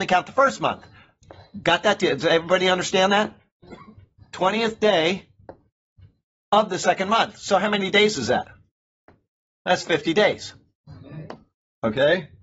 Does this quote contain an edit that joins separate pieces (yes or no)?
no